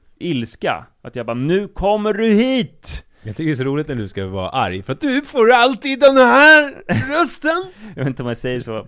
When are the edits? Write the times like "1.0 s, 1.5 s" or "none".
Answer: none